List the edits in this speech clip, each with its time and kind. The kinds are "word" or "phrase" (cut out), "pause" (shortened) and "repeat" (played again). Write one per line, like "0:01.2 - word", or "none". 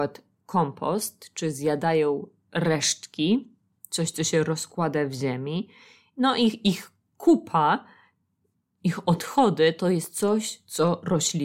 none